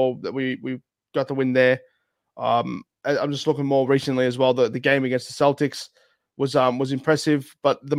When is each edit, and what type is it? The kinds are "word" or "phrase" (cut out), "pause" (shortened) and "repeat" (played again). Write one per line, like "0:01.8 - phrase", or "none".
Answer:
none